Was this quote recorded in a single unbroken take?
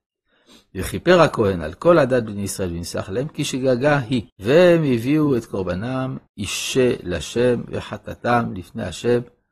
no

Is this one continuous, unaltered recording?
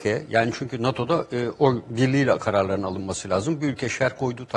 yes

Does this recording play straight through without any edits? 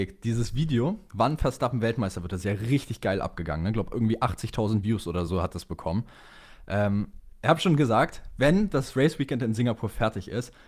yes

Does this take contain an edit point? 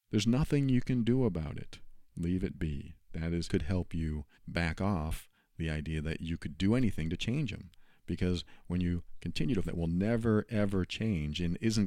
yes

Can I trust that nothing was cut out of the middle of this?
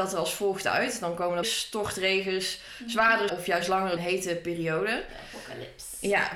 no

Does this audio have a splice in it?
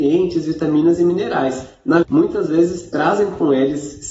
yes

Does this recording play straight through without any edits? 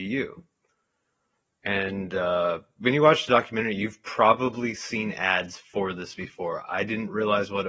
yes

